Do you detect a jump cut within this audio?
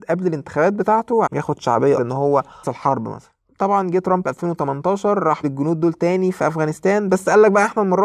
yes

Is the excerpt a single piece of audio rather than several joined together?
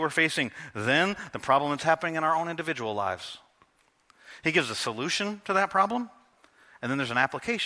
yes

